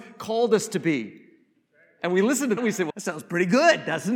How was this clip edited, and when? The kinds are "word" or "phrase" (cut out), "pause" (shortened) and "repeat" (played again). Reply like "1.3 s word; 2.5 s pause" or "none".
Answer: 2.6 s word; 2.9 s word